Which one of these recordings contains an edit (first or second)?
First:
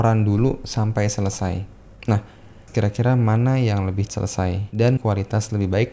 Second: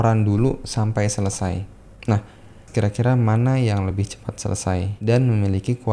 first